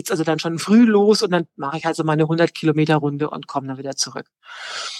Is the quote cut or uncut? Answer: uncut